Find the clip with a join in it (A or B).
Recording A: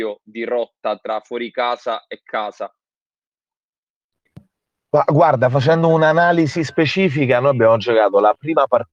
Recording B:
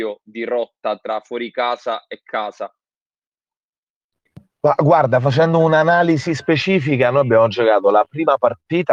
B